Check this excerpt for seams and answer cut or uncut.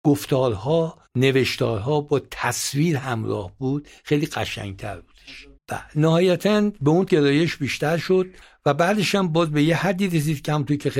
cut